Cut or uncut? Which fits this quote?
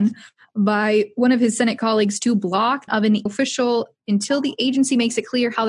cut